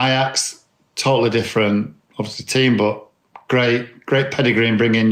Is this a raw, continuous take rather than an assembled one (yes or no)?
yes